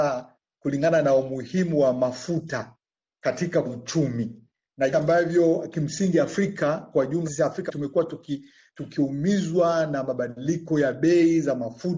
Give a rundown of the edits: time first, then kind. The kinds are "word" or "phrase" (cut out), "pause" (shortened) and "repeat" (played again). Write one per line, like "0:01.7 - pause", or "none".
0:03.6 - word
0:04.9 - word
0:07.2 - word
0:07.7 - word

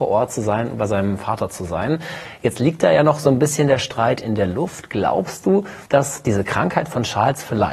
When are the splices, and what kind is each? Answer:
0:04.2 - word
0:05.9 - pause

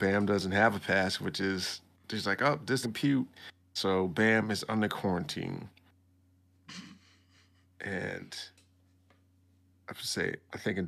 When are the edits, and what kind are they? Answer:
0:02.8 - word

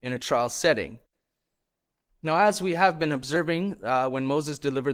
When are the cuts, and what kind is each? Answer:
none

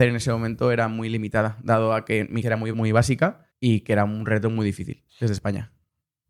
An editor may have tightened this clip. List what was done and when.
0:02.4 - word
0:02.7 - word
0:03.5 - pause
0:05.1 - pause

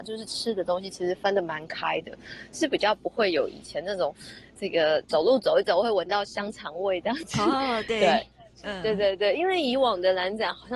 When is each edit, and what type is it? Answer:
none

